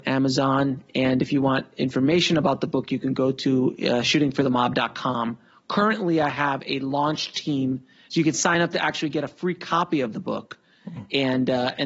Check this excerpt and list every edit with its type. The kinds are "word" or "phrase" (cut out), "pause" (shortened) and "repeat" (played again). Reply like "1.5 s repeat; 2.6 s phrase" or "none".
none